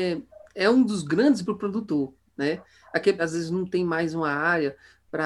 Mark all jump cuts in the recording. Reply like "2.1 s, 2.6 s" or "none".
1.4 s, 3.2 s